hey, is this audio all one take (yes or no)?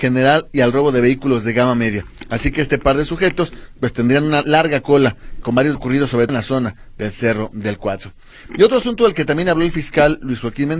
no